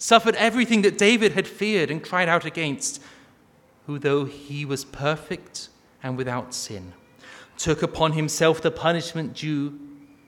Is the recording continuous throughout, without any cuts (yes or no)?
yes